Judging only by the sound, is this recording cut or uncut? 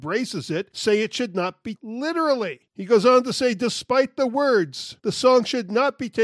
cut